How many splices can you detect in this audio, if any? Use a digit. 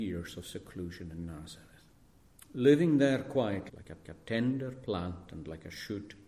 3